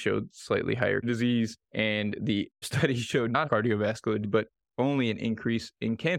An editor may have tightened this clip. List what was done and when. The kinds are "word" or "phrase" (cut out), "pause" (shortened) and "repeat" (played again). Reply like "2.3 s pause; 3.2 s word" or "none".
1.0 s word; 1.6 s pause; 2.6 s word; 3.4 s word; 4.2 s word